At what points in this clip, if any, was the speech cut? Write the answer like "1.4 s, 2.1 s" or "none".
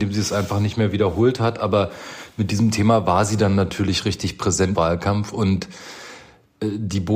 4.7 s